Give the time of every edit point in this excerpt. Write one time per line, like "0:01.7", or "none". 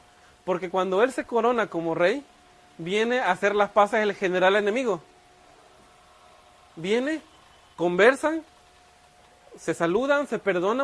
none